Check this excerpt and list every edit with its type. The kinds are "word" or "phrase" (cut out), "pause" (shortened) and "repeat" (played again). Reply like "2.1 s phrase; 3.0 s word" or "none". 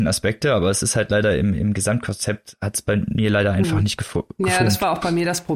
none

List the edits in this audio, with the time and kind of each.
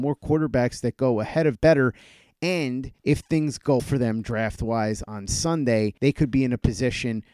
1.5 s phrase; 3.0 s pause; 3.8 s word; 6.0 s pause

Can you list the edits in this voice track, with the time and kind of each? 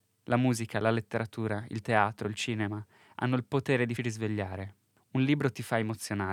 4.0 s word

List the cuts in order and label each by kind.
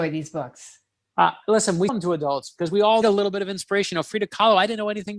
1.0 s pause; 1.9 s word; 3.0 s word

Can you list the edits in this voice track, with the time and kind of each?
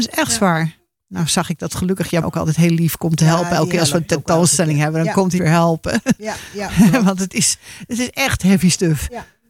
2.2 s word; 5.4 s phrase

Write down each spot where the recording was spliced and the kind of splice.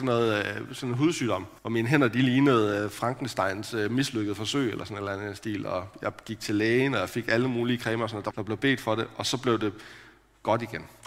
1.6 s pause; 8.3 s phrase

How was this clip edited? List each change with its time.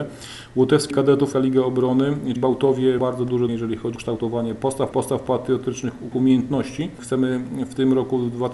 0.9 s word; 1.3 s word; 2.4 s word; 3.0 s word; 3.5 s word; 4.0 s word; 4.9 s word; 6.1 s word

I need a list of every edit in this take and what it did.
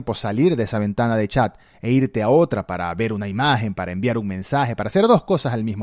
none

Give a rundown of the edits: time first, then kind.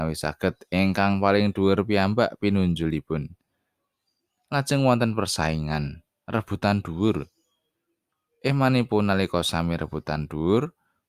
none

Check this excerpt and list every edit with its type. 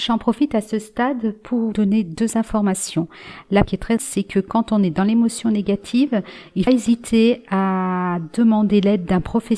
1.7 s word; 3.6 s word; 4.0 s word; 6.7 s phrase

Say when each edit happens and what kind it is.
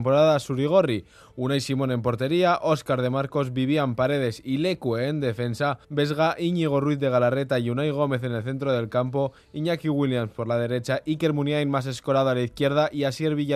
5.8 s pause

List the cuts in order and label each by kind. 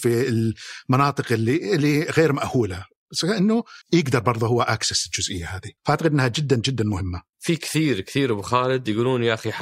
3.8 s pause; 5.8 s pause

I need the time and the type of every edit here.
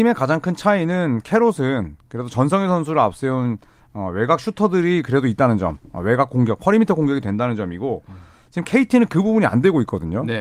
none

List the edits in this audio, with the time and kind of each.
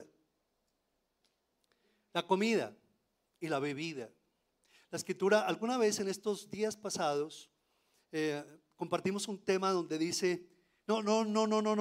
none

